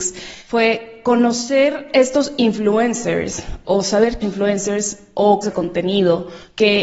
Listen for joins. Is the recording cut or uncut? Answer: cut